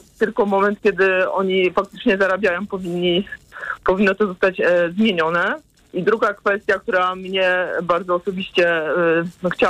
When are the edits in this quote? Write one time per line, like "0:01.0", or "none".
0:05.8